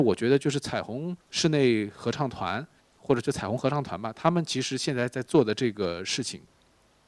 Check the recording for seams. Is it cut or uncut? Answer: cut